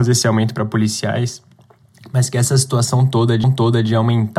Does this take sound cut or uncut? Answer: cut